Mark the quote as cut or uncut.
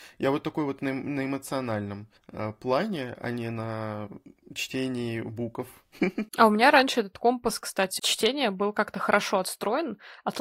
cut